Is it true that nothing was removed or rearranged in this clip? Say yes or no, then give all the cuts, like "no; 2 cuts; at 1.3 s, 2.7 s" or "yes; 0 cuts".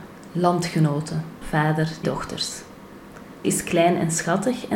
no; 3 cuts; at 1.4 s, 2.0 s, 3.4 s